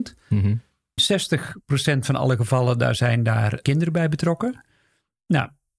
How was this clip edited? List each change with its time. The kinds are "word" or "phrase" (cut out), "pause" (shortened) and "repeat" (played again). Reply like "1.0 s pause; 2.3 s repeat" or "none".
1.0 s word; 3.6 s word